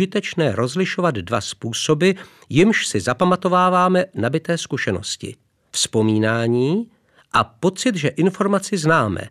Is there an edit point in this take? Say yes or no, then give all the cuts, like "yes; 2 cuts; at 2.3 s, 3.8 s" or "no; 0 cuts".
no; 0 cuts